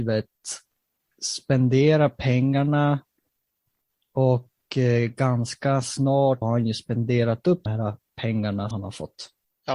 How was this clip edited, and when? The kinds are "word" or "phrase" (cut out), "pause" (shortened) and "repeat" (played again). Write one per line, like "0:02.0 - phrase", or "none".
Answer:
0:06.4 - word
0:07.7 - word
0:08.7 - word